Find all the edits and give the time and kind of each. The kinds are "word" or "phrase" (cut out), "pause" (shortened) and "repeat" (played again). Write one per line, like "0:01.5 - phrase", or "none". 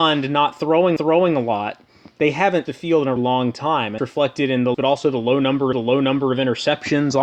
0:01.0 - repeat
0:02.7 - word
0:03.2 - word
0:04.0 - word
0:04.7 - phrase
0:05.7 - repeat